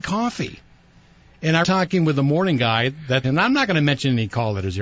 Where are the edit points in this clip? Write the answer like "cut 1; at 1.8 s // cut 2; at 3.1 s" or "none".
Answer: cut 1; at 1.6 s // cut 2; at 3.2 s